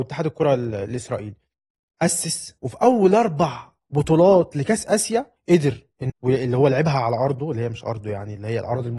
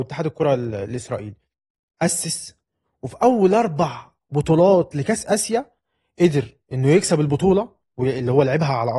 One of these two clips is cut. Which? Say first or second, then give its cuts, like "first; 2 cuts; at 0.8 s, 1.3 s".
first; 3 cuts; at 2.6 s, 5.4 s, 6.1 s